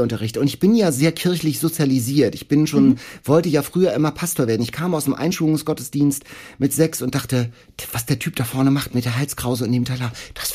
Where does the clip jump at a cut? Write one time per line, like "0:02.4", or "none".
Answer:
none

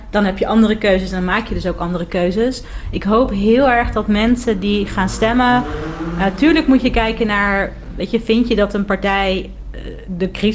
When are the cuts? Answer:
none

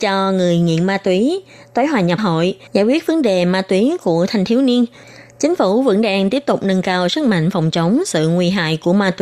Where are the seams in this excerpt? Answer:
0:02.2
0:02.7

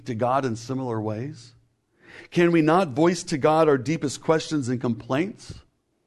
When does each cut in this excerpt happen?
none

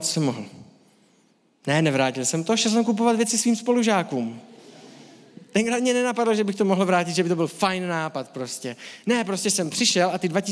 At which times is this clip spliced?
none

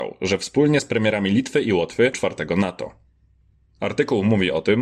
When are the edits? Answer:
0:02.1

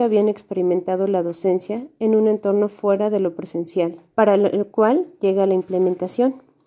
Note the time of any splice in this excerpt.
0:04.1

